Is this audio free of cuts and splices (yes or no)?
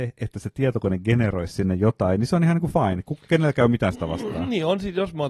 yes